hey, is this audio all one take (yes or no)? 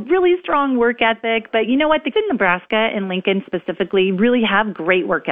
no